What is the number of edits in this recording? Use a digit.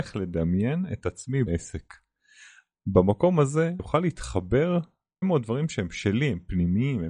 3